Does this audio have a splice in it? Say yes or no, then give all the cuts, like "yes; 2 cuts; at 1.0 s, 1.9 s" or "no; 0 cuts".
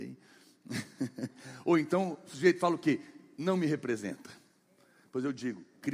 no; 0 cuts